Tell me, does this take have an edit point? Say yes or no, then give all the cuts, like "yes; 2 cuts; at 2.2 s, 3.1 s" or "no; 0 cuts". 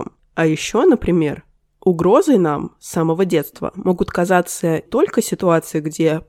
yes; 1 cut; at 4.9 s